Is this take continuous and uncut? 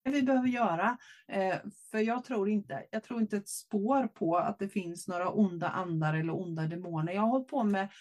yes; 0 cuts

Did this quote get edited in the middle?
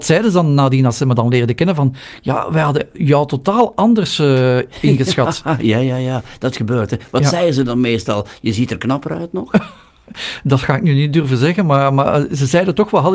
no; 0 cuts

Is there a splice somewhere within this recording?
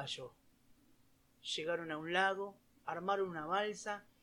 no; 0 cuts

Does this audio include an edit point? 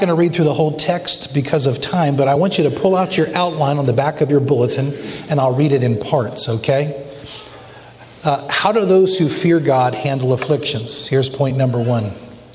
no; 0 cuts

